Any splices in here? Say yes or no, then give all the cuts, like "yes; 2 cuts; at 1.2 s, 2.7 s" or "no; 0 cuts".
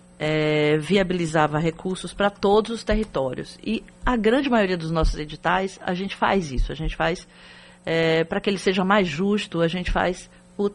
no; 0 cuts